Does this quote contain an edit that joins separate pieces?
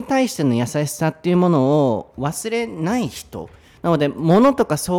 no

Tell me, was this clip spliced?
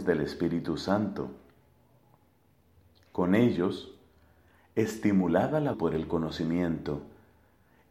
yes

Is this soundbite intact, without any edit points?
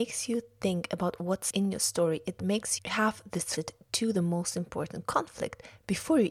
no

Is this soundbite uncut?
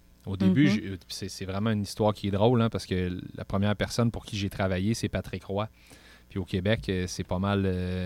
yes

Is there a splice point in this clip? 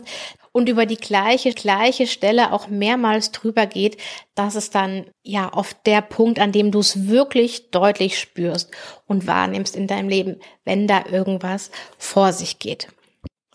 yes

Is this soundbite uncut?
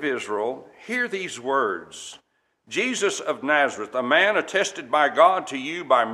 yes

